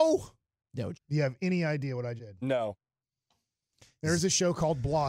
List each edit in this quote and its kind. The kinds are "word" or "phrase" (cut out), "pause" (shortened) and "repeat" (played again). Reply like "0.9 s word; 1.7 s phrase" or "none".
0.9 s word; 2.2 s word